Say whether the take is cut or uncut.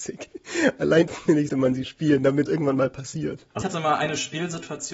cut